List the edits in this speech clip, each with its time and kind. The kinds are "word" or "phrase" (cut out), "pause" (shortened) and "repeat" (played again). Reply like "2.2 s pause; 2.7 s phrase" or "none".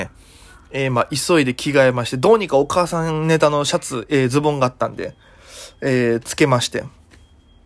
none